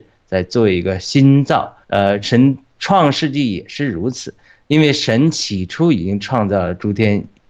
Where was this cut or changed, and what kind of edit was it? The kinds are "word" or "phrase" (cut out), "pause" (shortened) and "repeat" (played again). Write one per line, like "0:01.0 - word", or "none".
0:01.8 - pause